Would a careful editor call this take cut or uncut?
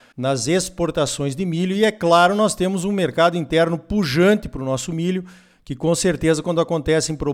uncut